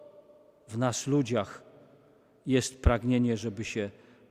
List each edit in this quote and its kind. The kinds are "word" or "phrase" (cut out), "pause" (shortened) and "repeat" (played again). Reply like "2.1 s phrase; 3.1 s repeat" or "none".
none